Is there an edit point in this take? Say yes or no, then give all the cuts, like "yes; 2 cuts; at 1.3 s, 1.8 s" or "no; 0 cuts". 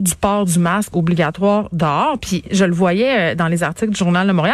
no; 0 cuts